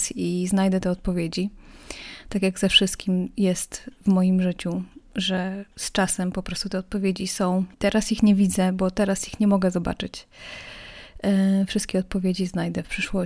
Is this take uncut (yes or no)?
no